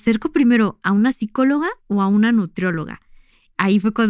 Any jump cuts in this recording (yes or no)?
yes